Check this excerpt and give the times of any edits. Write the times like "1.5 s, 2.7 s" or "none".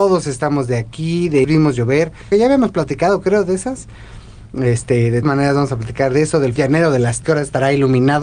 1.4 s, 2.3 s, 5.2 s, 6.6 s, 7.2 s